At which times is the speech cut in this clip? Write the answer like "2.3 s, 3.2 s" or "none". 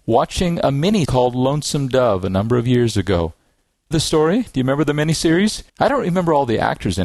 1.0 s, 3.9 s, 5.7 s